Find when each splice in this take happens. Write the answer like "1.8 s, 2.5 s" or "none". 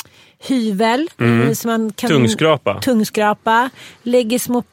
1.1 s